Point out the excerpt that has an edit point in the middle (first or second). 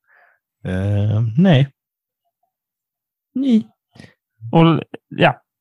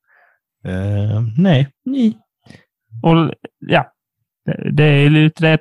second